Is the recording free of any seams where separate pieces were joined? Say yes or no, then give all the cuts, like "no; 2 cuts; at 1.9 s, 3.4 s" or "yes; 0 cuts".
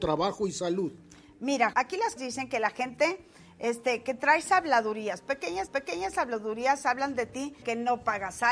no; 4 cuts; at 1.7 s, 2.2 s, 5.7 s, 7.6 s